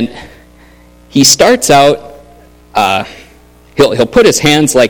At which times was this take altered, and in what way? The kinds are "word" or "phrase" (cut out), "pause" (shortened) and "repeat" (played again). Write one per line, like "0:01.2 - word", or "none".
none